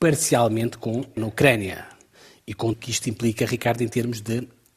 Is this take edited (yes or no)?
yes